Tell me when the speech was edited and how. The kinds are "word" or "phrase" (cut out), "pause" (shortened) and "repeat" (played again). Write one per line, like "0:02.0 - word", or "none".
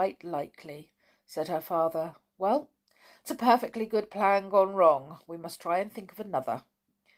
0:03.2 - word